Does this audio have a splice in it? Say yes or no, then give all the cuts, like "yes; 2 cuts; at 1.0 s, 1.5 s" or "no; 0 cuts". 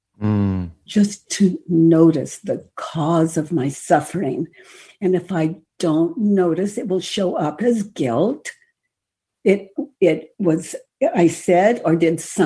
no; 0 cuts